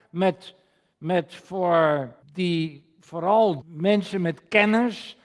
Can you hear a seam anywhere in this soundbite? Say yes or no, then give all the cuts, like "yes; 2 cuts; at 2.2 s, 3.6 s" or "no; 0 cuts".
yes; 2 cuts; at 2.2 s, 3.6 s